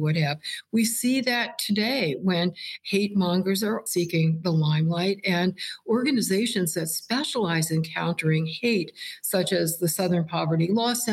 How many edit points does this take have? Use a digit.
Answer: 1